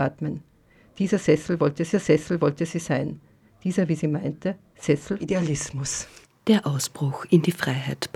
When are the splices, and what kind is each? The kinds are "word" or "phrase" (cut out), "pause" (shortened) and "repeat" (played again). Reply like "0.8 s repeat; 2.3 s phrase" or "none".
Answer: 1.9 s repeat; 5.2 s word; 6.2 s pause